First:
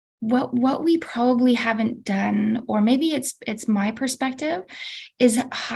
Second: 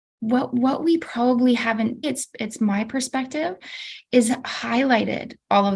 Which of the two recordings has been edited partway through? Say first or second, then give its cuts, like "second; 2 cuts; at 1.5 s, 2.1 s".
second; 1 cut; at 2.0 s